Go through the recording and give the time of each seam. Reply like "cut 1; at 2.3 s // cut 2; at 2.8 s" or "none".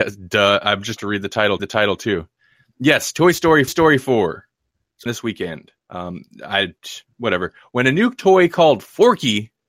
cut 1; at 1.0 s // cut 2; at 1.6 s // cut 3; at 3.7 s // cut 4; at 5.1 s // cut 5; at 5.8 s